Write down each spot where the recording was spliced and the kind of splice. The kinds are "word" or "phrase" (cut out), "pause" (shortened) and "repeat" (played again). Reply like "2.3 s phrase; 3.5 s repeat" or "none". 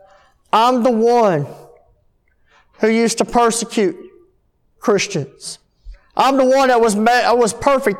none